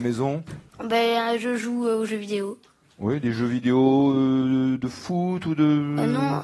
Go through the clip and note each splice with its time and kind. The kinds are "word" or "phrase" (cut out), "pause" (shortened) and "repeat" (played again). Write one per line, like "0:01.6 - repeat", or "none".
none